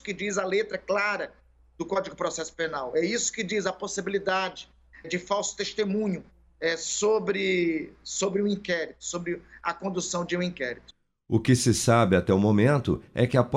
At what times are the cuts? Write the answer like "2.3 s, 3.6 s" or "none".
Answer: 5.0 s